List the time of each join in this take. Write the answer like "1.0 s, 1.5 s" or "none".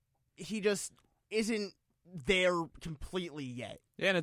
none